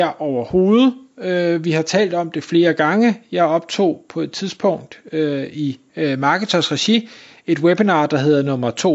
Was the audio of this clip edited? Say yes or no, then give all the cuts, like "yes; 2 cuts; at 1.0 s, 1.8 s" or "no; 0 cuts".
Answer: no; 0 cuts